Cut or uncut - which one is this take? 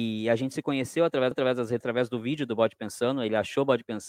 cut